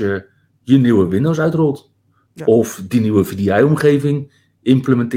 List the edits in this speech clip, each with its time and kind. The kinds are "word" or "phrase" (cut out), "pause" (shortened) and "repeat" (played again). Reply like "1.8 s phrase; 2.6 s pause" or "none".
none